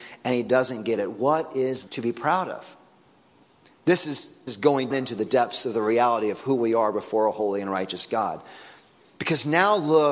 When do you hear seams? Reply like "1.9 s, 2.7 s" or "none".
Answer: 1.9 s, 4.5 s, 4.9 s